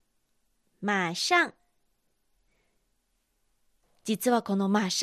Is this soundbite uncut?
yes; 0 cuts

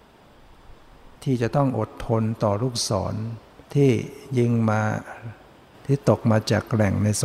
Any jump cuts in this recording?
yes; 2 cuts; at 1.2 s, 3.6 s

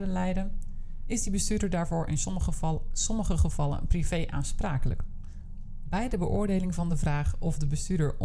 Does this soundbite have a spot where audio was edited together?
no; 0 cuts

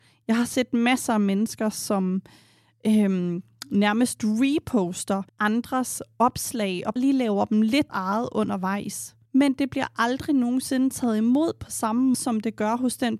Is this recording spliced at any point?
yes; 5 cuts; at 5.3 s, 7.0 s, 7.9 s, 9.3 s, 12.1 s

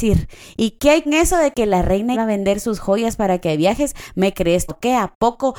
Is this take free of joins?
no; 3 cuts; at 1.1 s, 2.1 s, 4.7 s

